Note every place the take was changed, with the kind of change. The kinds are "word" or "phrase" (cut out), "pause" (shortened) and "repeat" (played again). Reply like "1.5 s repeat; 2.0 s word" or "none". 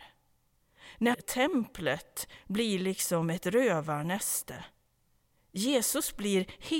1.1 s phrase